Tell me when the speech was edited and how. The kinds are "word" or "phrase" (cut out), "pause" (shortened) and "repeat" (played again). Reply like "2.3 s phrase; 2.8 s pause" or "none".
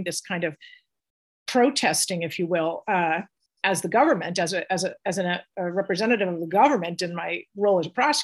none